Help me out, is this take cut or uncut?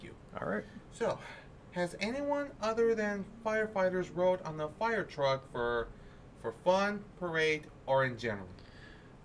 uncut